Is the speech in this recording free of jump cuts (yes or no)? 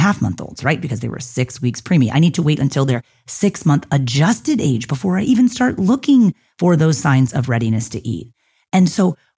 yes